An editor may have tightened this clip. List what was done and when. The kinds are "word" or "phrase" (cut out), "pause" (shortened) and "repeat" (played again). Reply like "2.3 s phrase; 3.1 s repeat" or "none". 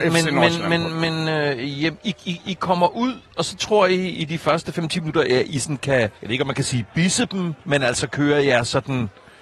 6.2 s pause; 7.6 s pause